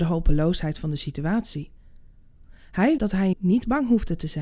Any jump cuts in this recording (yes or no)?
yes